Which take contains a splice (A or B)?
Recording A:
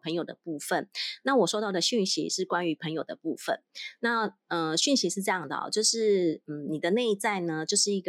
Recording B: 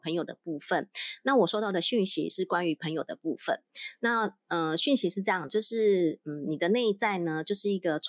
B